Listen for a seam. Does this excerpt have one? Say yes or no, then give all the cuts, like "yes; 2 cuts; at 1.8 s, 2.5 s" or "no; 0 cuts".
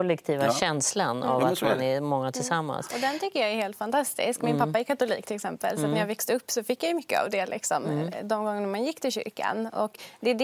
no; 0 cuts